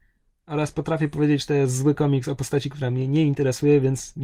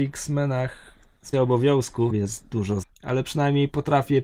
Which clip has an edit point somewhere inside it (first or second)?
second